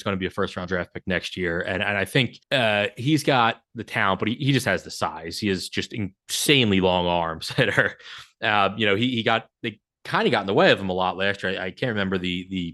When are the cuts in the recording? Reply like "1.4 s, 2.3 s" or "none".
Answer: 2.4 s